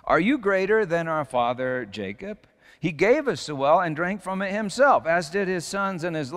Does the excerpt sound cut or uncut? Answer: uncut